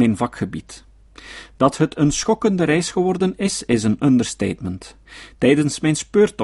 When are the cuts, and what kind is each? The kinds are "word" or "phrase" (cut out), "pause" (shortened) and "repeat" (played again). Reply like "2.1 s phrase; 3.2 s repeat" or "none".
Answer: none